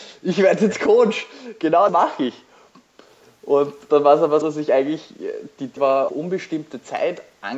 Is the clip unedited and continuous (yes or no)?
no